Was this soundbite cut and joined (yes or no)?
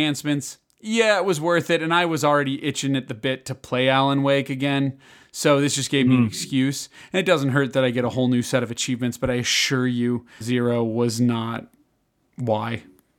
yes